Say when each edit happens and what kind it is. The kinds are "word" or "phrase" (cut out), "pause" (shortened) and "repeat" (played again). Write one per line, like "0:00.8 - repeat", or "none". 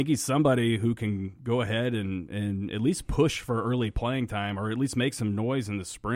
none